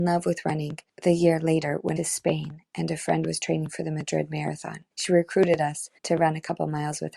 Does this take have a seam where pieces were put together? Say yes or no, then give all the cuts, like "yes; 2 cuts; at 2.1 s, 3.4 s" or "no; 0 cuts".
yes; 3 cuts; at 2.0 s, 4.9 s, 6.0 s